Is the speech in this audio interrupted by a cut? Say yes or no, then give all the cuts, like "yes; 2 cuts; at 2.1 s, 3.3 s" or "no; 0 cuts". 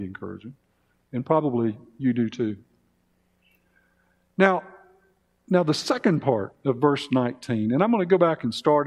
no; 0 cuts